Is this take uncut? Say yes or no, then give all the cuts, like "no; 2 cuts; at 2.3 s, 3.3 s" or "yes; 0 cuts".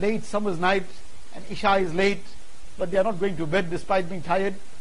yes; 0 cuts